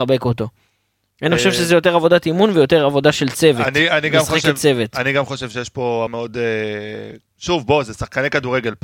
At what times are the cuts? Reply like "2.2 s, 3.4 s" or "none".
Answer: 6.1 s, 7.2 s